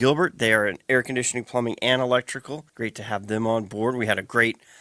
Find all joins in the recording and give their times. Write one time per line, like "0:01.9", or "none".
0:02.7